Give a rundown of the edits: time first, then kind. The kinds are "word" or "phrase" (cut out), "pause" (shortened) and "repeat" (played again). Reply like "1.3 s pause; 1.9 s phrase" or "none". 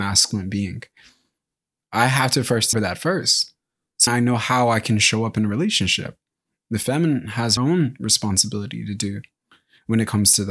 2.7 s word; 4.1 s word; 7.6 s word